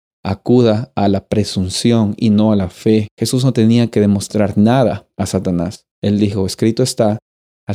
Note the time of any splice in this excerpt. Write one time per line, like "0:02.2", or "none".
0:03.1
0:05.9